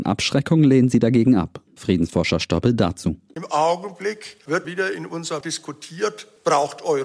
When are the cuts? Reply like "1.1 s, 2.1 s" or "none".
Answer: 1.7 s, 4.6 s, 5.4 s